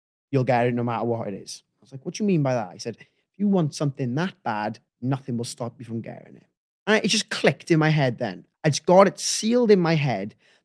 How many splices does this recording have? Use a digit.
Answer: 3